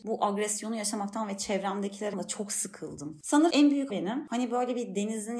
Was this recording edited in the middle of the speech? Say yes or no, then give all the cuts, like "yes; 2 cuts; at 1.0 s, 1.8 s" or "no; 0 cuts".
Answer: yes; 3 cuts; at 2.1 s, 3.5 s, 3.9 s